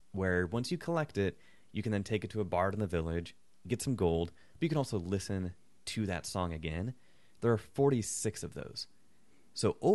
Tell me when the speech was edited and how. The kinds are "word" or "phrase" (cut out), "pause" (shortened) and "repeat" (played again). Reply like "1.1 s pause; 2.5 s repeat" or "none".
none